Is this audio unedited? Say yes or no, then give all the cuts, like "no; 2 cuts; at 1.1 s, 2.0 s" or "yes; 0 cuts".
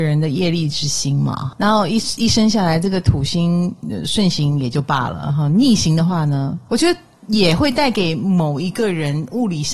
yes; 0 cuts